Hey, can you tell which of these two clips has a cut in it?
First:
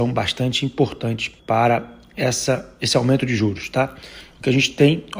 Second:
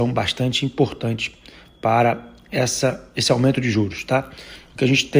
first; 1 cut; at 1.4 s

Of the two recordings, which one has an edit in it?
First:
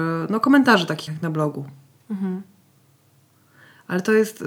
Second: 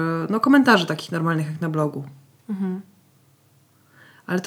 first; 1 cut; at 1.1 s

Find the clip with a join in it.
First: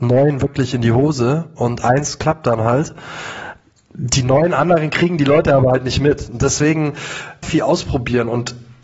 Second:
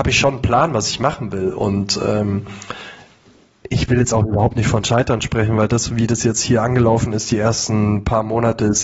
first; 1 cut; at 7.4 s

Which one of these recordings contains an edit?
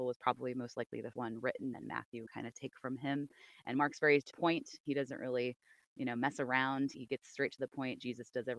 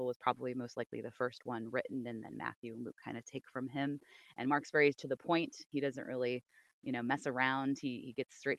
first; 5 cuts; at 1.1 s, 1.7 s, 2.3 s, 4.3 s, 6.9 s

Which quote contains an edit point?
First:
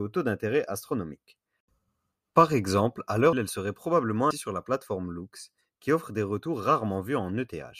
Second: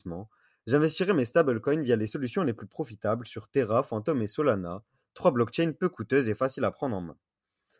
first; 2 cuts; at 3.3 s, 4.3 s

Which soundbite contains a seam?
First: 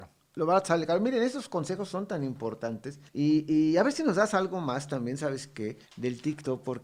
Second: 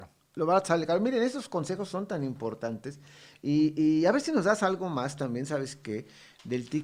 first; 2 cuts; at 3.1 s, 5.8 s

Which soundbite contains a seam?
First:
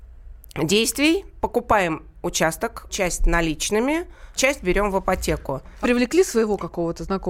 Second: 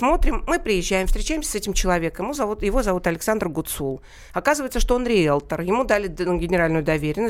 first; 4 cuts; at 1.4 s, 2.9 s, 4.4 s, 5.8 s

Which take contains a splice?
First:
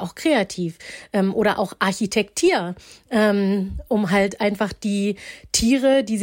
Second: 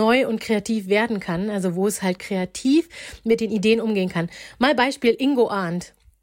second; 1 cut; at 2.2 s

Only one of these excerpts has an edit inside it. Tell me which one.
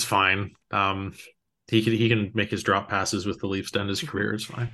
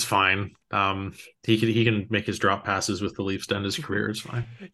second; 1 cut; at 1.3 s

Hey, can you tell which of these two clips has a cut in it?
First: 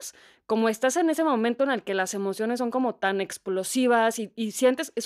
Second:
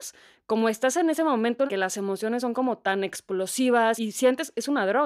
second; 2 cuts; at 1.7 s, 4.0 s

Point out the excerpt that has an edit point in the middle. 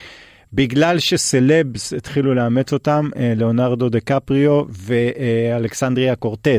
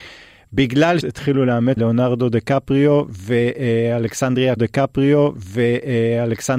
second; 3 cuts; at 1.0 s, 1.8 s, 4.6 s

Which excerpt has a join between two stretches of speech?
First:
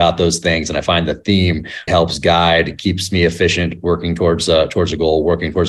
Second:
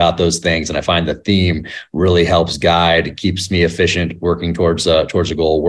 first; 1 cut; at 1.9 s

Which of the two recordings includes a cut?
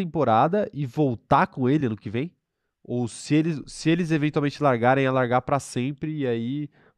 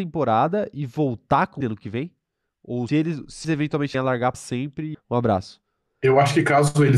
second; 6 cuts; at 1.6 s, 2.9 s, 3.4 s, 3.9 s, 4.3 s, 4.9 s

